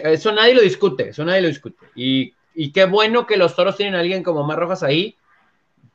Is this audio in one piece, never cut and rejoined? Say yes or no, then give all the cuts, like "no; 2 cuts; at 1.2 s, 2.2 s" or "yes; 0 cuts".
yes; 0 cuts